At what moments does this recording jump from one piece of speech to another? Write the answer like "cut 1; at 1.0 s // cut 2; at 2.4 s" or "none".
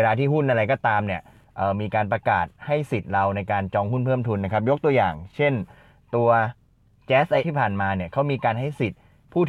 cut 1; at 7.4 s